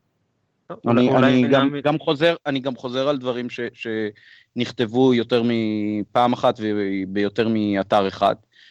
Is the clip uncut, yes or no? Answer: yes